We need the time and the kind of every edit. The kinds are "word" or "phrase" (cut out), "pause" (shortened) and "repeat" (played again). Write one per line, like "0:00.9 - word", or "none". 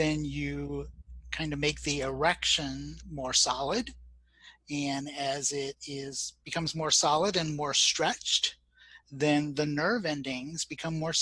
none